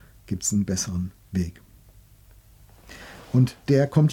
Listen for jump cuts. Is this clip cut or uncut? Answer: uncut